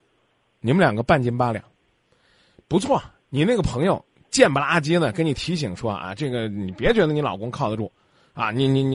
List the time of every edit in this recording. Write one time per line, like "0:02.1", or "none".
none